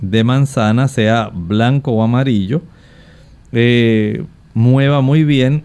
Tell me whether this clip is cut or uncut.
uncut